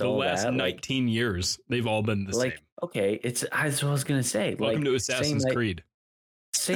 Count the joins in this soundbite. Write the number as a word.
one